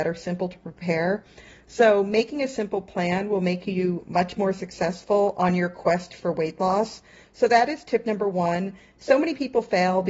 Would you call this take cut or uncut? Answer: uncut